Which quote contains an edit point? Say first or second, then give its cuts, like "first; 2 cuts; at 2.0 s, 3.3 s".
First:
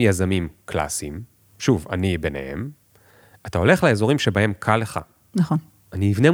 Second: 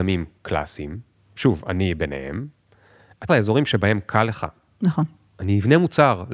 second; 1 cut; at 3.3 s